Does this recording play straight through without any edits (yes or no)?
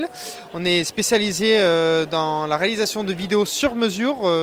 yes